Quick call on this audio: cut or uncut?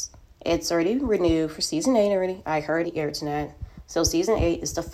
cut